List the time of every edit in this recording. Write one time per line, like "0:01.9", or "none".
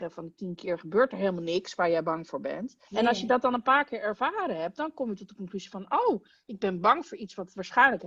0:02.8